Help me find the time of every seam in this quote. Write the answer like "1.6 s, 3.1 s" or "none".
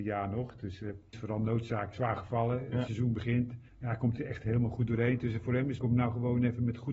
1.1 s, 1.9 s, 2.9 s, 3.7 s, 4.2 s, 5.8 s